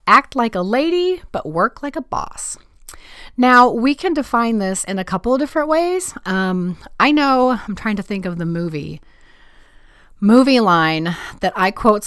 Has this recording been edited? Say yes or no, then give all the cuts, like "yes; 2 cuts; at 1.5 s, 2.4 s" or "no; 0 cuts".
no; 0 cuts